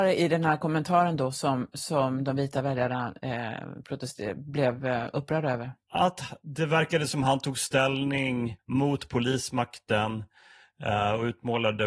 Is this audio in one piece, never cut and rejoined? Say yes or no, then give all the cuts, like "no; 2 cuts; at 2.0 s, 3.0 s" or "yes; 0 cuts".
no; 2 cuts; at 5.8 s, 8.6 s